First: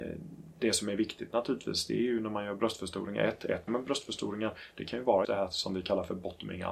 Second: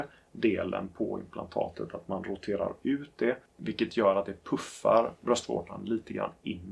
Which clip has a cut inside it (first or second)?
first